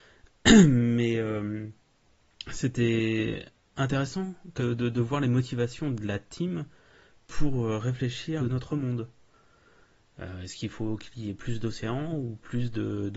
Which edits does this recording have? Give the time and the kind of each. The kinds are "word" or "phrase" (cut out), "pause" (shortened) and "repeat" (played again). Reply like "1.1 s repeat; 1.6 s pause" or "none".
4.6 s word; 8.4 s phrase